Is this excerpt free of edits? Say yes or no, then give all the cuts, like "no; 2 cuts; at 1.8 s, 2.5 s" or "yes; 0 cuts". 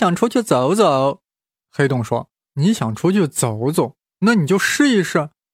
yes; 0 cuts